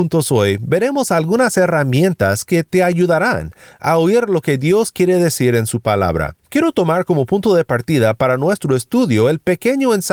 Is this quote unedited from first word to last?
no; 1 cut; at 6.4 s

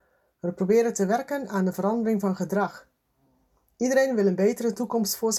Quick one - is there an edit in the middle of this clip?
no; 0 cuts

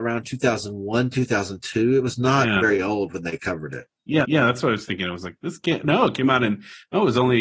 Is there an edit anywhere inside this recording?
yes; 1 cut; at 4.2 s

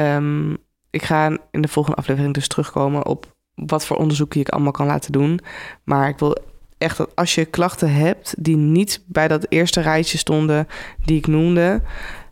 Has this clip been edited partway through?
no; 0 cuts

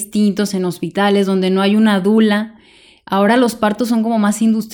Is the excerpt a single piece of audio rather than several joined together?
yes; 0 cuts

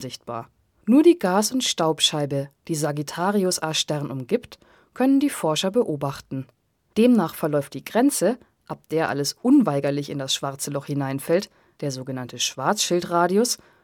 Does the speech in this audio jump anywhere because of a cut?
no; 0 cuts

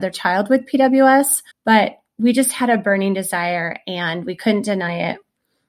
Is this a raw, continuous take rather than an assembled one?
no; 1 cut; at 1.5 s

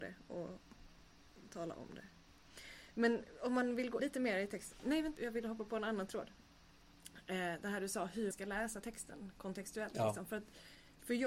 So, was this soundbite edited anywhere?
yes; 3 cuts; at 4.0 s, 5.2 s, 8.3 s

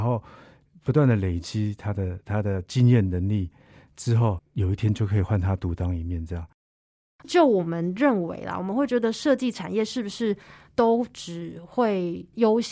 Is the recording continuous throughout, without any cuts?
yes; 0 cuts

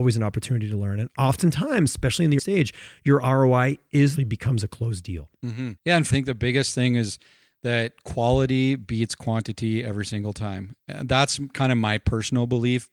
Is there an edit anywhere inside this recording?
yes; 4 cuts; at 2.4 s, 4.2 s, 5.8 s, 6.1 s

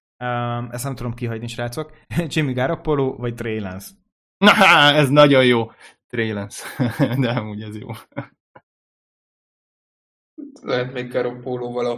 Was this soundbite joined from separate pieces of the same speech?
yes; 1 cut; at 2.0 s

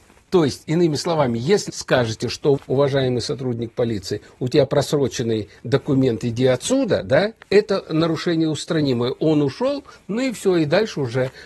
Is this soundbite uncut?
no; 3 cuts; at 1.7 s, 2.6 s, 7.4 s

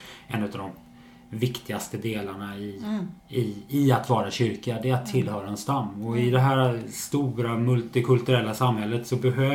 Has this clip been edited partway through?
yes; 1 cut; at 3.2 s

